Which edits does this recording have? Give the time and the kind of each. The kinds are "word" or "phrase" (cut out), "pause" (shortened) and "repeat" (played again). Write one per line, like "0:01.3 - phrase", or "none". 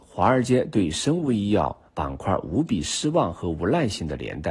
0:01.9 - pause